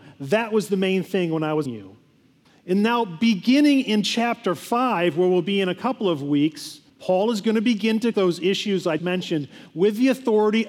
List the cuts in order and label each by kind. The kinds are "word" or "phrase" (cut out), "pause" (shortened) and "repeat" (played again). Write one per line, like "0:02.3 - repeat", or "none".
0:01.7 - word
0:02.4 - pause
0:06.9 - pause
0:08.1 - word
0:09.0 - word